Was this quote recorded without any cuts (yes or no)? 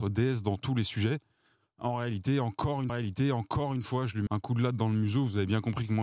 no